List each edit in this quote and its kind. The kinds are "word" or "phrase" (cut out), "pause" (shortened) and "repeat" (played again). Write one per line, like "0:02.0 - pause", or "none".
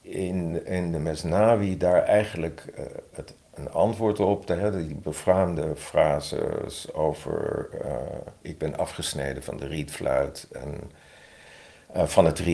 none